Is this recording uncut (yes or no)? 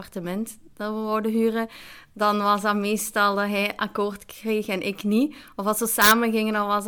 yes